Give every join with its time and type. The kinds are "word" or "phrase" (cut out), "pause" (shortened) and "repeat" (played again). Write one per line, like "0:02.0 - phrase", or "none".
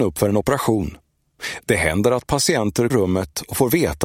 0:02.9 - phrase